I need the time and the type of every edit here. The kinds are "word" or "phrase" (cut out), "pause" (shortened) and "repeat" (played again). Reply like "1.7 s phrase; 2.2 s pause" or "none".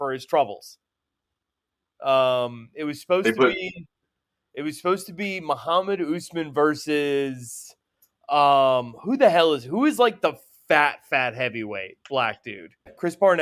none